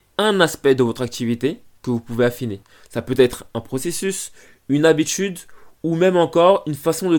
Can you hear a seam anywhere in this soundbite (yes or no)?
no